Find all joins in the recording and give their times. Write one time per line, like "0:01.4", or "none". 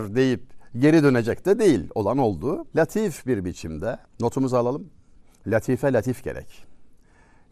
0:02.7
0:04.1
0:05.2